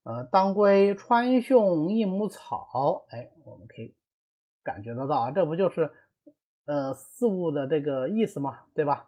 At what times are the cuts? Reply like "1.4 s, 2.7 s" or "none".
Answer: none